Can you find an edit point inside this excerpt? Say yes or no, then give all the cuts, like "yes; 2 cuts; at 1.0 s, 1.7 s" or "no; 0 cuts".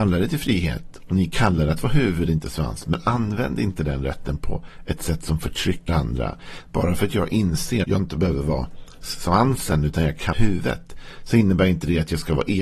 yes; 3 cuts; at 5.9 s, 7.8 s, 10.3 s